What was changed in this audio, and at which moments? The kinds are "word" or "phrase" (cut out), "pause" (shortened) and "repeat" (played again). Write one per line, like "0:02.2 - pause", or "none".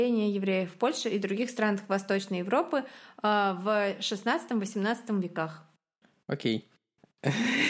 none